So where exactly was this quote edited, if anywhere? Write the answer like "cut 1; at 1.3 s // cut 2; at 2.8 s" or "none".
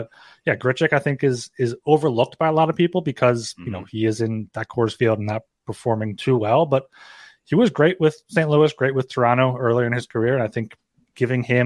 none